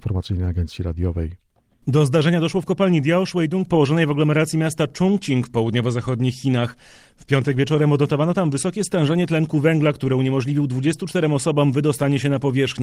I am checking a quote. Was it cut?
no; 0 cuts

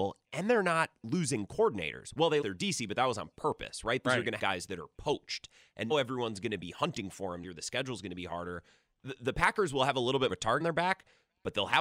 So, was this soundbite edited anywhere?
yes; 7 cuts; at 2.4 s, 4.0 s, 4.4 s, 5.9 s, 7.4 s, 10.3 s, 10.6 s

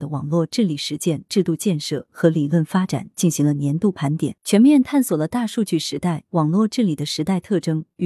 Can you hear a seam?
yes; 1 cut; at 4.4 s

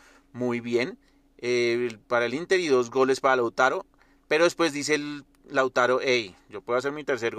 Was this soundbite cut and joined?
no; 0 cuts

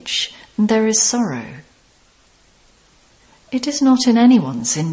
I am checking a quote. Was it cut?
no; 0 cuts

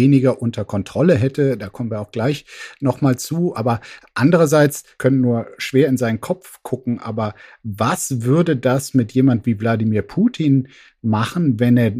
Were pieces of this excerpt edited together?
no; 0 cuts

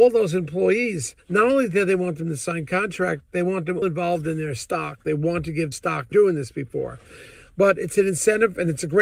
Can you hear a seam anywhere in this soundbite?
yes; 3 cuts; at 3.8 s, 5.7 s, 6.1 s

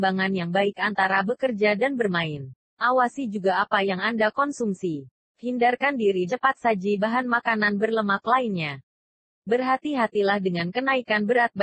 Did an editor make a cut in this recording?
yes; 3 cuts; at 2.7 s, 6.3 s, 7.0 s

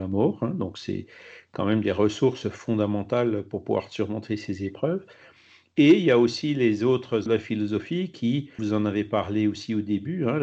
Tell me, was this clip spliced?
yes; 2 cuts; at 7.3 s, 8.6 s

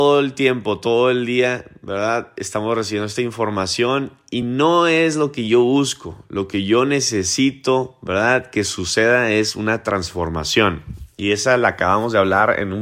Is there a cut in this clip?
no; 0 cuts

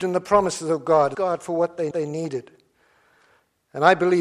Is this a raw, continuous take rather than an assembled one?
no; 2 cuts; at 1.1 s, 1.9 s

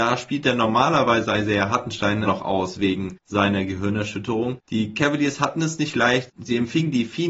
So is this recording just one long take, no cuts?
no; 1 cut; at 2.3 s

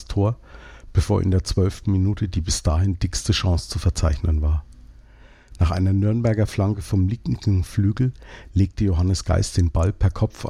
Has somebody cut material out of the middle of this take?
no; 0 cuts

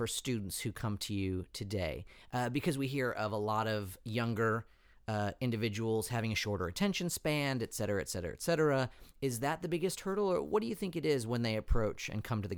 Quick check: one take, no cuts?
yes; 0 cuts

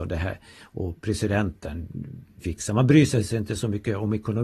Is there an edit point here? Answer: yes; 1 cut; at 2.4 s

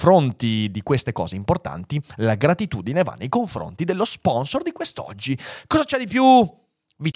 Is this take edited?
no; 0 cuts

